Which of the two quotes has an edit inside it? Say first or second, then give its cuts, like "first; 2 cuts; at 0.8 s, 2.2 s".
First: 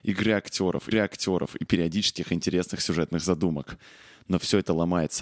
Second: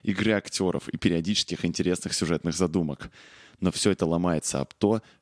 first; 1 cut; at 0.9 s